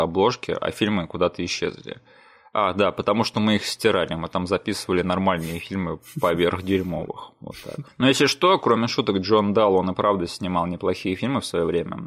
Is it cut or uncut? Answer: uncut